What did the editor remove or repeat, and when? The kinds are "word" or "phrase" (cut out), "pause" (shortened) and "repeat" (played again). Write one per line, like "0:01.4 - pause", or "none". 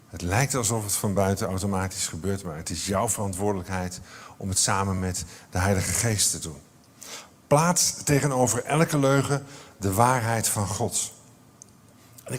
none